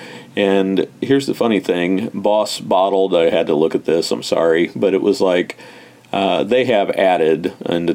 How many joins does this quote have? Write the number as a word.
zero